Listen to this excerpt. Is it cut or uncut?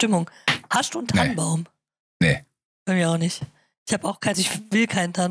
cut